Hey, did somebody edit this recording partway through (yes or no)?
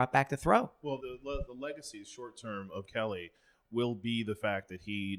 yes